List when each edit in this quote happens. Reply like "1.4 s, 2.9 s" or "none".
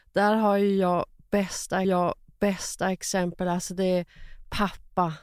1.8 s